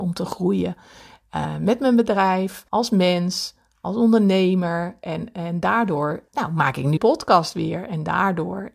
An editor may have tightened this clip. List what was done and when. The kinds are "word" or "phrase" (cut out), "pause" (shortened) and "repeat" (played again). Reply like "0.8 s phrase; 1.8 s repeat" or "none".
2.7 s pause; 6.3 s pause; 7.0 s phrase